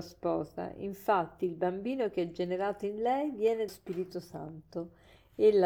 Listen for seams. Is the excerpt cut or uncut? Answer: cut